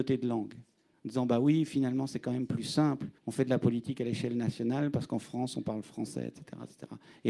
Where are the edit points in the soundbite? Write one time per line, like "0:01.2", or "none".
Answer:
0:03.2